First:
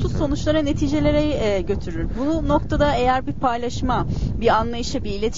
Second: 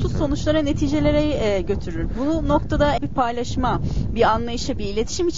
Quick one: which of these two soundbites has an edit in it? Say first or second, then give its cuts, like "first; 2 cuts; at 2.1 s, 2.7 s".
second; 1 cut; at 3.0 s